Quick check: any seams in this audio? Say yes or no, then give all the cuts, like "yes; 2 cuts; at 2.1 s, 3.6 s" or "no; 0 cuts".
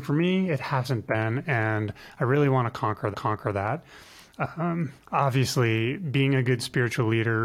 yes; 2 cuts; at 3.1 s, 5.0 s